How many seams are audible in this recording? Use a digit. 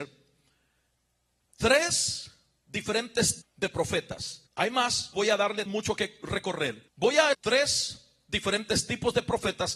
6